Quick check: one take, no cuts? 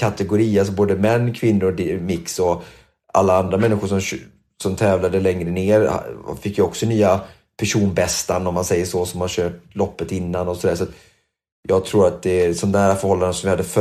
yes; 0 cuts

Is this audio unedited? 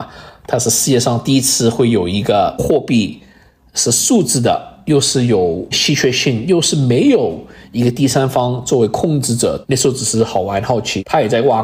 yes; 0 cuts

